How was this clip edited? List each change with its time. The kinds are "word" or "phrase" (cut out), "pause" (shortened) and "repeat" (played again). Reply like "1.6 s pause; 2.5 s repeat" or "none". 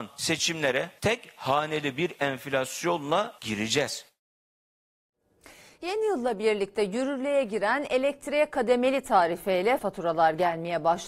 9.8 s word